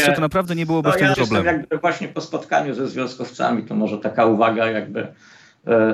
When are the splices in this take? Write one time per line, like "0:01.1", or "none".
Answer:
0:01.1